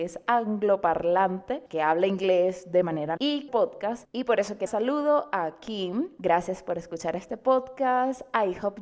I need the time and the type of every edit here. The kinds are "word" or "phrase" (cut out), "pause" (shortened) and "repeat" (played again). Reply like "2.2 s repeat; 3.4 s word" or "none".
1.7 s pause; 3.2 s word; 3.5 s phrase; 4.7 s phrase